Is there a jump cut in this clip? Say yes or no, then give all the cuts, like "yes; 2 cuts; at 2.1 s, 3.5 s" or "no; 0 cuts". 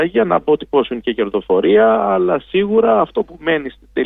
no; 0 cuts